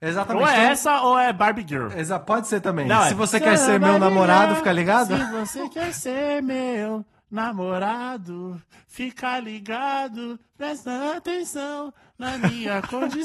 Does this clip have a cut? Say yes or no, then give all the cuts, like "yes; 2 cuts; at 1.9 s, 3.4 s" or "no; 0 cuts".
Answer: no; 0 cuts